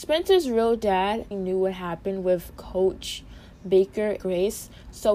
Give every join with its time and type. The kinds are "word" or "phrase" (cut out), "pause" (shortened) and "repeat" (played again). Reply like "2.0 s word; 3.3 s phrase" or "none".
1.3 s word; 2.6 s word; 4.2 s word